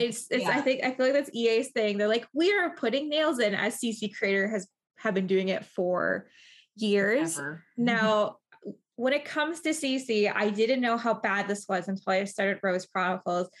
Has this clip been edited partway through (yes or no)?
no